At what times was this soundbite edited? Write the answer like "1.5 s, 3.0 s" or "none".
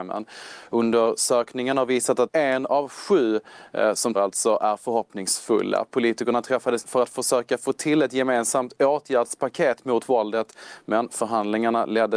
2.3 s, 4.1 s, 6.8 s